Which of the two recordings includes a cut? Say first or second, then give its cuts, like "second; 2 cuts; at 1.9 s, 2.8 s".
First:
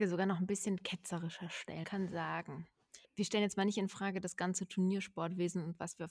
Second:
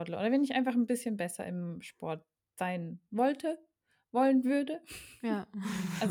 first; 2 cuts; at 1.8 s, 3.0 s